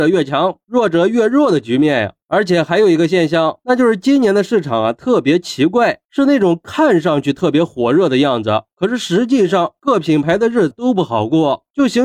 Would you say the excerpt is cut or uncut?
cut